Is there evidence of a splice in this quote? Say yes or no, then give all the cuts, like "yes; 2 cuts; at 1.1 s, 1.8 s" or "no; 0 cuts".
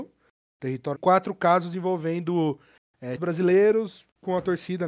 yes; 2 cuts; at 0.9 s, 3.2 s